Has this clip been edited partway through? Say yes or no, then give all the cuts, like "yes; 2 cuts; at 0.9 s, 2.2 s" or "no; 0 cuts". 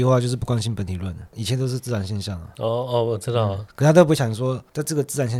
yes; 1 cut; at 3.7 s